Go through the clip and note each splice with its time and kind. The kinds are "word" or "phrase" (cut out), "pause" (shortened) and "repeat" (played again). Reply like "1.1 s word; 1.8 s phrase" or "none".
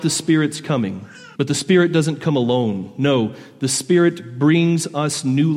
1.3 s pause